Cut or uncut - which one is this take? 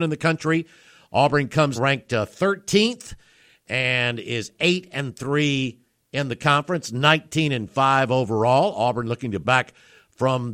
cut